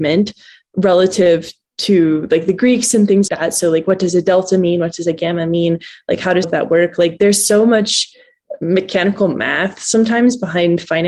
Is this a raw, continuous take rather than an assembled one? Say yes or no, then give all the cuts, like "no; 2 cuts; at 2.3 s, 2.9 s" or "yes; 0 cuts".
no; 2 cuts; at 3.3 s, 6.4 s